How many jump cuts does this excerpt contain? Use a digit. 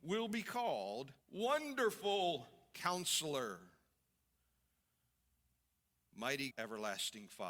2